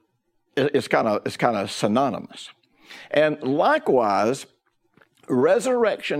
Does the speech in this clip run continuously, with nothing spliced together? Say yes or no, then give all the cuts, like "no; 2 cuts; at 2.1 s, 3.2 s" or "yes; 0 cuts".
yes; 0 cuts